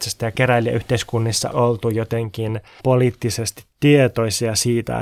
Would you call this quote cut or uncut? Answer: cut